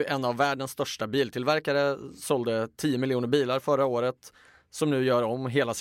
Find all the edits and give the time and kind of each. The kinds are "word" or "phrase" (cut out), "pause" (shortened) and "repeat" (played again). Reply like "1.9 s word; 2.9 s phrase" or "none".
none